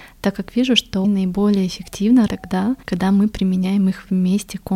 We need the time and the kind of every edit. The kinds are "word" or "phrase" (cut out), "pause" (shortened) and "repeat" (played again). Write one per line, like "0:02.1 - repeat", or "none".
0:01.0 - word
0:02.3 - word
0:02.8 - pause